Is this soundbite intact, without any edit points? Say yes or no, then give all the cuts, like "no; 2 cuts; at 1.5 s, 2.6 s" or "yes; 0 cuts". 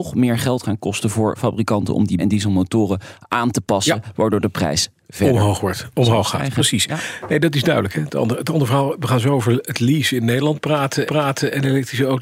no; 2 cuts; at 2.2 s, 11.1 s